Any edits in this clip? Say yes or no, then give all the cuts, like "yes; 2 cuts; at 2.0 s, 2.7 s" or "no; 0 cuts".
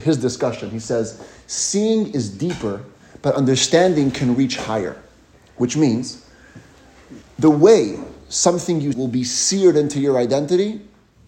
yes; 4 cuts; at 3.0 s, 5.3 s, 7.2 s, 8.9 s